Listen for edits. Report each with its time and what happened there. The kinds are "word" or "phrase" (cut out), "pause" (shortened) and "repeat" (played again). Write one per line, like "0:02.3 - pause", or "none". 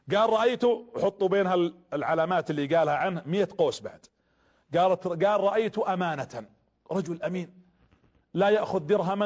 none